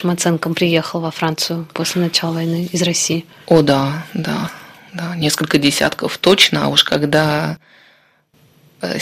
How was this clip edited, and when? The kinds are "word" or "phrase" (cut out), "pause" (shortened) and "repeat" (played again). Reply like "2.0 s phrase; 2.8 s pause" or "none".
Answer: none